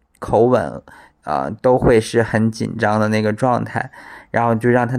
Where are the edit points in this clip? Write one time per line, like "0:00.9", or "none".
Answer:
none